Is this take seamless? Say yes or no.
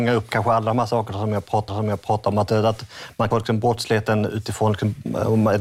no